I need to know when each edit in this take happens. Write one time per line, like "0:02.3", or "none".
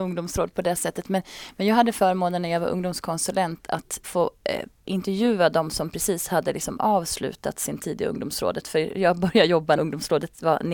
0:04.0
0:09.8